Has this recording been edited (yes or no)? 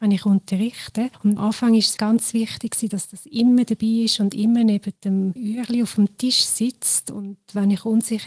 yes